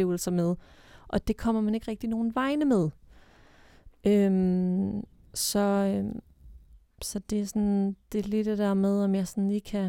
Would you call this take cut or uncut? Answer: uncut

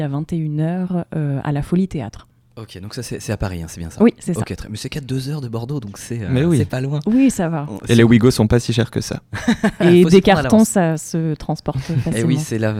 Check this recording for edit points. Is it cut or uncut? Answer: uncut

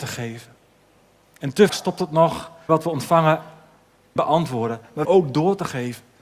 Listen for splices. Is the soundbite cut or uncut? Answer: cut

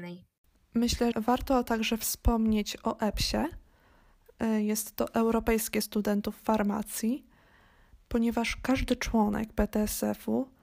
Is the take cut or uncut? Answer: cut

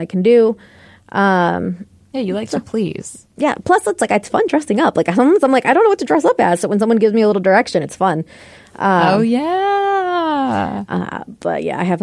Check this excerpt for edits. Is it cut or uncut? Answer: uncut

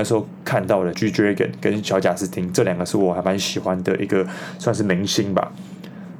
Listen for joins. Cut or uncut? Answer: cut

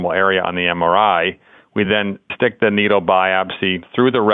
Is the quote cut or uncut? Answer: uncut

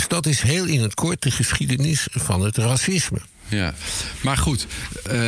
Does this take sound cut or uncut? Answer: uncut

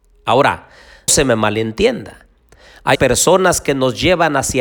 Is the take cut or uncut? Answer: cut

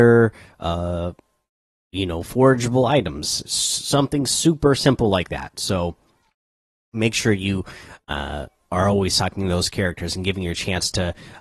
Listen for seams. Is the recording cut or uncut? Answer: uncut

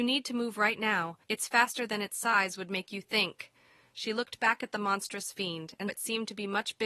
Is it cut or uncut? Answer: cut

